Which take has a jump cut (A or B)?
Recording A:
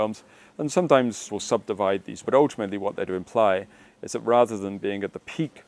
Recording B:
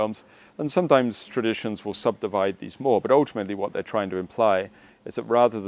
A